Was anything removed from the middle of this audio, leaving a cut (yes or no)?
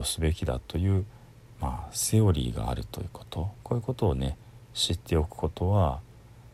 yes